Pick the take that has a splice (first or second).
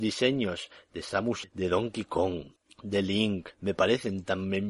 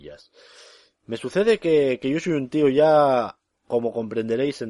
first